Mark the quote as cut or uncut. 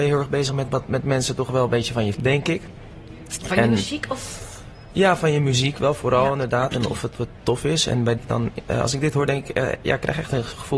cut